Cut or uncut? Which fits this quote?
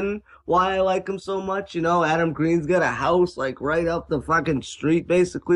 uncut